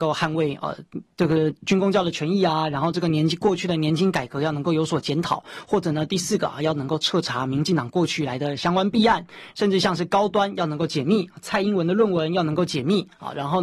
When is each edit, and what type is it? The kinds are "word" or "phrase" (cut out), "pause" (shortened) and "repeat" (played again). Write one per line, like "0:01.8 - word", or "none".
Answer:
0:09.5 - phrase